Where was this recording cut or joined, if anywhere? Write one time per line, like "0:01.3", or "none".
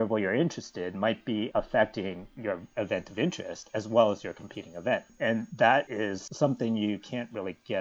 0:01.5